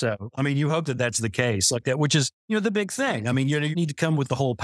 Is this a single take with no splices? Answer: no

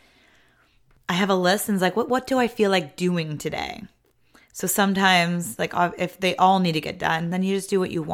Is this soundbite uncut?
yes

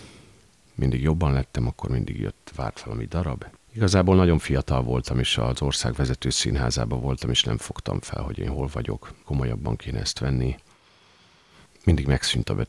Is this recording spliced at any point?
yes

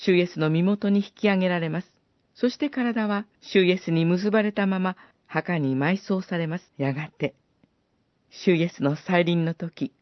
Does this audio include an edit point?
yes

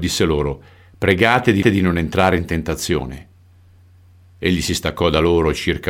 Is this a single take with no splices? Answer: no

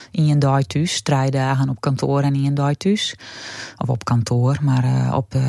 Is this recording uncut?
yes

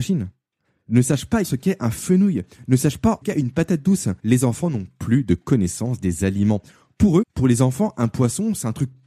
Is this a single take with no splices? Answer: no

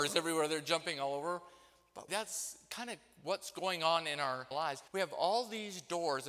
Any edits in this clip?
yes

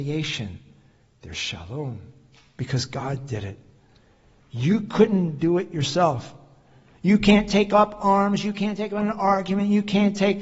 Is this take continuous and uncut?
yes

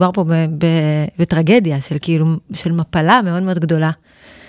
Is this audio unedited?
yes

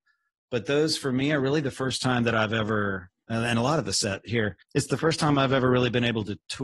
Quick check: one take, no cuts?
no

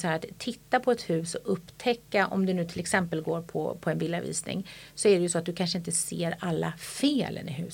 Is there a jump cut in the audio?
no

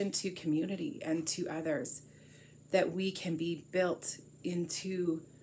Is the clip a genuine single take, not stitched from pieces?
yes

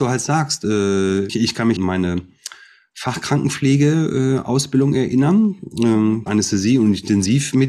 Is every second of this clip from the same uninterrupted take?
no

